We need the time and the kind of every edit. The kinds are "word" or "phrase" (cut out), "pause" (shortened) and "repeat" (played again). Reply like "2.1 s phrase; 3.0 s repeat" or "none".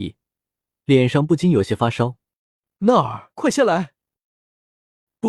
3.3 s pause